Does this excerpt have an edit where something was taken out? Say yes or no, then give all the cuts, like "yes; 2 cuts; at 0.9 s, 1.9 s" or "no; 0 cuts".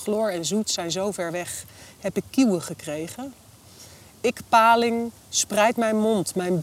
no; 0 cuts